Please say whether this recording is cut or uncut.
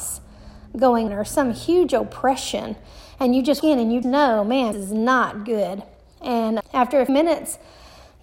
cut